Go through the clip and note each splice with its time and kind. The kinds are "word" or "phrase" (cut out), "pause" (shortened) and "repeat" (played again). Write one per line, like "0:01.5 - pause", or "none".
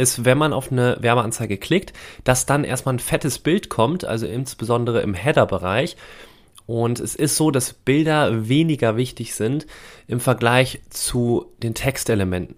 none